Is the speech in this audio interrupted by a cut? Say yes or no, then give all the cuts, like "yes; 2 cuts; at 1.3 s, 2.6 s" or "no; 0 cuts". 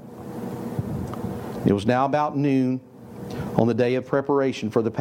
no; 0 cuts